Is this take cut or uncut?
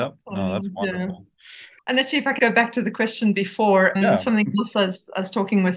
cut